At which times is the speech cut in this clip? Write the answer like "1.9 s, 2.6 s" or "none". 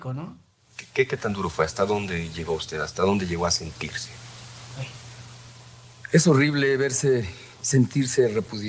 none